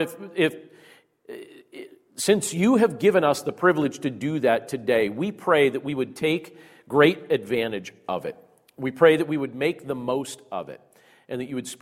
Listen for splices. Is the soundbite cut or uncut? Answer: uncut